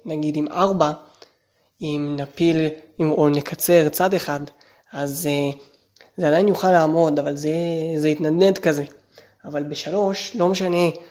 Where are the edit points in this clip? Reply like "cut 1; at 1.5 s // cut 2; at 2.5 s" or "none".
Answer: none

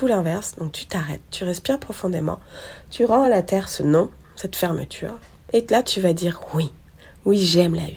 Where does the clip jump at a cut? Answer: none

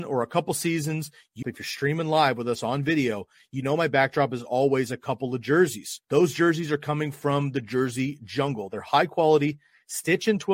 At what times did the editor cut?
cut 1; at 1.4 s // cut 2; at 6.0 s

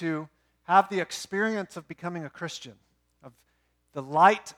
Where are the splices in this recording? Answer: none

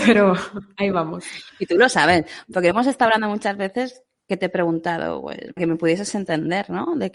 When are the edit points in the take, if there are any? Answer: cut 1; at 5.6 s

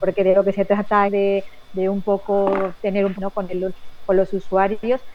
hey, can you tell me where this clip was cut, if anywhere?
cut 1; at 1.0 s // cut 2; at 3.1 s

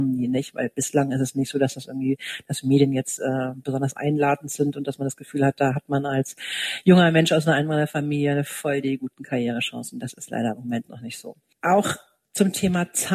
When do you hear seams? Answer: none

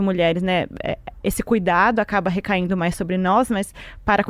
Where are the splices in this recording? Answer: none

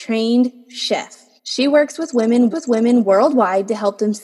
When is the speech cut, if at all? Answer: cut 1; at 1.4 s // cut 2; at 2.5 s

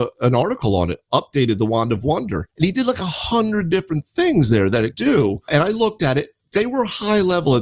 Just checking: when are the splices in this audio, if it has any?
cut 1; at 2.5 s // cut 2; at 4.9 s

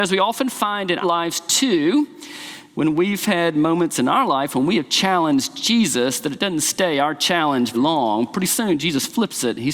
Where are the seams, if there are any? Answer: cut 1; at 1.0 s // cut 2; at 7.7 s

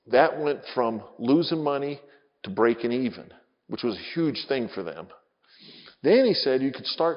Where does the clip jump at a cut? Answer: none

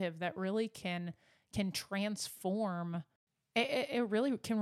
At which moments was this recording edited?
none

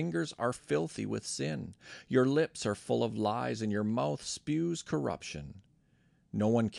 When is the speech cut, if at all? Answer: none

